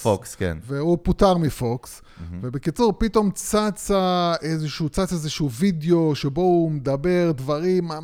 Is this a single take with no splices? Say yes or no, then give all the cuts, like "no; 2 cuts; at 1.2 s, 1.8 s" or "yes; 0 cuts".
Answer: yes; 0 cuts